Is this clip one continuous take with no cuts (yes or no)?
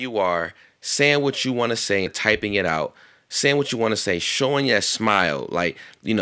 no